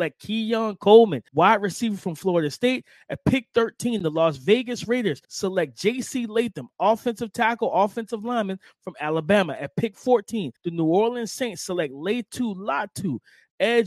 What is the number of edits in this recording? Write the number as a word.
three